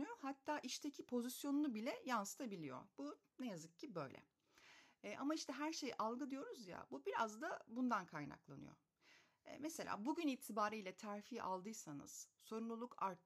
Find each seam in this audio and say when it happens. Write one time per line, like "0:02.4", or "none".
none

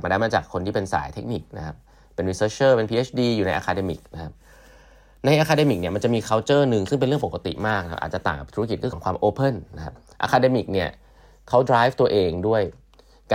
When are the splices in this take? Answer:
0:08.9

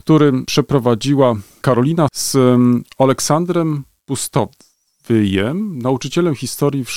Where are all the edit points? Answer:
0:02.1

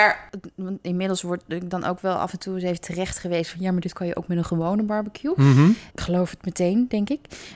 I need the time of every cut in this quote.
0:05.9

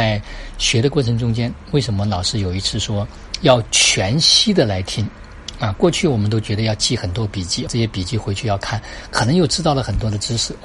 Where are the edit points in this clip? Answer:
0:07.7

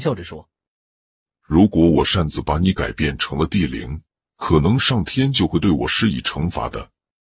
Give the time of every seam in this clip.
0:04.3

